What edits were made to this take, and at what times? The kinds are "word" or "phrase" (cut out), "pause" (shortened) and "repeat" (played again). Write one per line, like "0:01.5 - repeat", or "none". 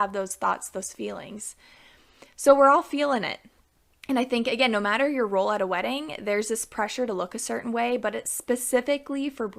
none